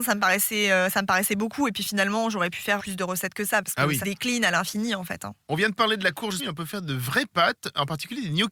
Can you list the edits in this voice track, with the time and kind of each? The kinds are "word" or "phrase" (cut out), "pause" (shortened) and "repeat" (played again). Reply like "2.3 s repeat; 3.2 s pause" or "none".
2.8 s word; 4.0 s word; 6.4 s word